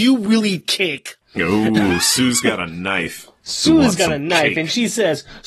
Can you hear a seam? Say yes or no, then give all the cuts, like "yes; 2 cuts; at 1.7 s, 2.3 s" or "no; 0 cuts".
no; 0 cuts